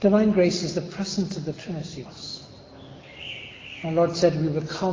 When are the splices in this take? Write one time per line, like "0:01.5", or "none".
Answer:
0:01.5
0:02.1